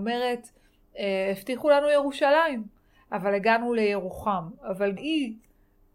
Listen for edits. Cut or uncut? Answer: cut